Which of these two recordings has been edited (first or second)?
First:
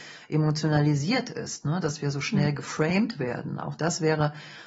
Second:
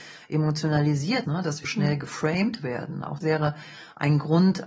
second